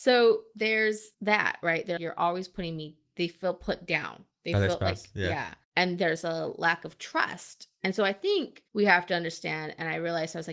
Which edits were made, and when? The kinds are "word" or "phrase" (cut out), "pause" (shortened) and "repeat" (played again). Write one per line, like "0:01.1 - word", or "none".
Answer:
0:01.1 - pause
0:02.0 - word
0:04.3 - pause
0:05.6 - pause
0:08.7 - pause